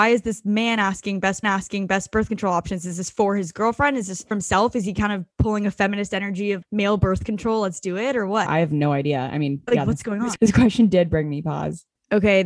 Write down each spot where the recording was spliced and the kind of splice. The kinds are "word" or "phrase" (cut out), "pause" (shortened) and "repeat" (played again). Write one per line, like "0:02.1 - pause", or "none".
0:01.4 - repeat
0:04.3 - word
0:06.6 - word